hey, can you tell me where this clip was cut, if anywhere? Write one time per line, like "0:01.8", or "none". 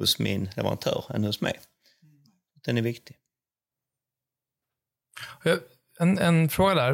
none